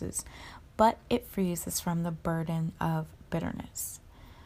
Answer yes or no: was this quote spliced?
no